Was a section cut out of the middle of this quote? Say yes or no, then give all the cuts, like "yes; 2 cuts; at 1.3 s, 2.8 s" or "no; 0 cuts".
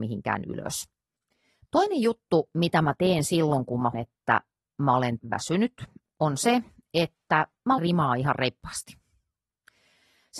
yes; 3 cuts; at 3.9 s, 5.2 s, 7.8 s